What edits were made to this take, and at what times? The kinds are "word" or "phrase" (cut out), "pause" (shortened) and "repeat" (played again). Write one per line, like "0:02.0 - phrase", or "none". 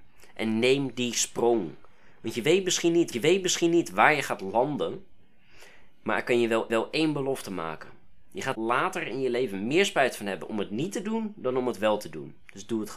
0:03.1 - repeat
0:06.7 - repeat
0:08.5 - word